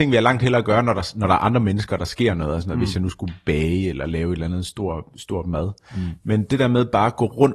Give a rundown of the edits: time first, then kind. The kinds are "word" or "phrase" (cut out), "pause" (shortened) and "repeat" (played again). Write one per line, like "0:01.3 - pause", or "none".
none